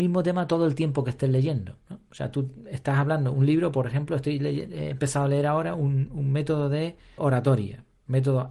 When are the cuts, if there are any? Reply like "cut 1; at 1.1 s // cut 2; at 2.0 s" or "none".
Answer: cut 1; at 7.2 s